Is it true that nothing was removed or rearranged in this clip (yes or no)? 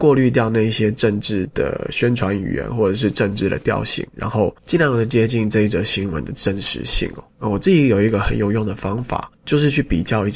no